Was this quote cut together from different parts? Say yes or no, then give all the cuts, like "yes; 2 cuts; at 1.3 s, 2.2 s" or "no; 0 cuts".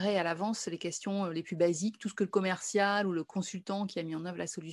no; 0 cuts